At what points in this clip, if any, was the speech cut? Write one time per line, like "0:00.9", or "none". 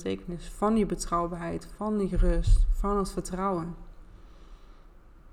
none

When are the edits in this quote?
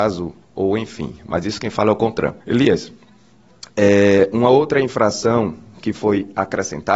0:02.4

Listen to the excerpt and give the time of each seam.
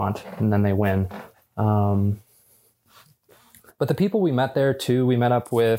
none

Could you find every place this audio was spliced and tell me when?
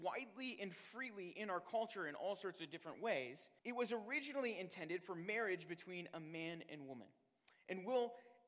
0:03.6

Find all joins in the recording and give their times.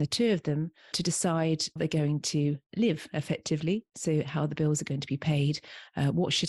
0:01.8

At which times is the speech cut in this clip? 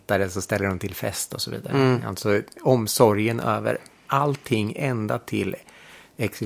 none

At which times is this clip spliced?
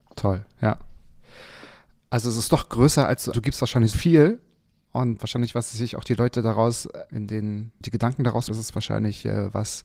0:03.3
0:03.9
0:05.2
0:07.1
0:07.8
0:08.5

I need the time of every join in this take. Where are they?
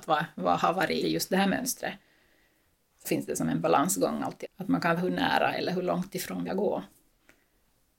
0:01.0
0:03.0
0:04.4
0:05.0
0:06.5

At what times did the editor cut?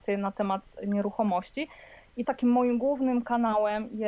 0:02.2

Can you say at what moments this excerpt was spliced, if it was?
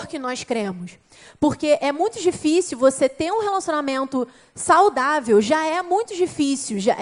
none

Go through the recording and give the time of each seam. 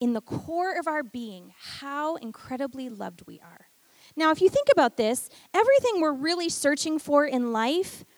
none

